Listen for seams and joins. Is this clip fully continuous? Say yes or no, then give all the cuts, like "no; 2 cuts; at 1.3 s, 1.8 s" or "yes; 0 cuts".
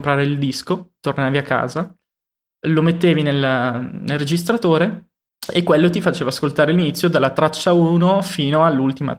yes; 0 cuts